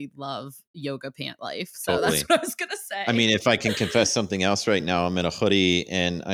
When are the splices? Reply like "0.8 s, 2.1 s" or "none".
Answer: none